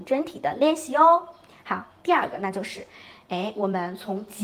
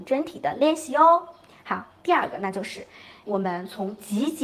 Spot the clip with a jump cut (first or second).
second